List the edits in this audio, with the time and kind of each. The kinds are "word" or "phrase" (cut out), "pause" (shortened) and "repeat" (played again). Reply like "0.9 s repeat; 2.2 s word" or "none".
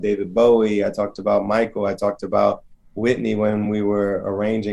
none